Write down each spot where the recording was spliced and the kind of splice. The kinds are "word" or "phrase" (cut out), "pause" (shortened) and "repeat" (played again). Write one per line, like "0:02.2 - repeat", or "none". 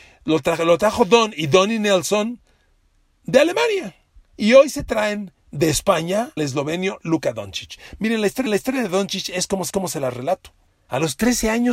0:05.4 - pause
0:06.4 - word
0:08.5 - repeat
0:09.7 - repeat
0:10.7 - pause